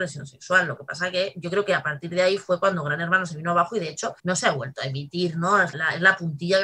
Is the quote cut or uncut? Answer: cut